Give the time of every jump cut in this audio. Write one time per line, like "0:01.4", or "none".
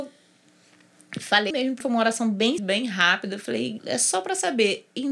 0:01.5
0:01.8
0:02.6
0:03.8